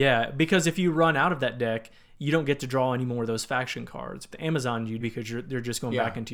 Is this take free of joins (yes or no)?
no